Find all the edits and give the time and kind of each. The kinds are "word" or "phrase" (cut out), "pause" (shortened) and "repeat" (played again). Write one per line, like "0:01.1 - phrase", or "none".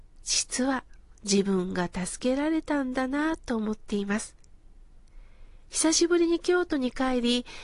0:05.7 - pause